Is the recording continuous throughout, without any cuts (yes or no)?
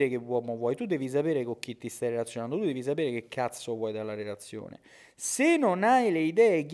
yes